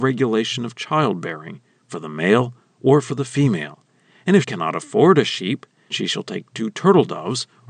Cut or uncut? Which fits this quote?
cut